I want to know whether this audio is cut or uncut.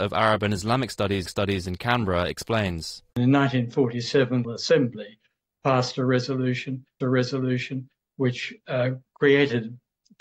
cut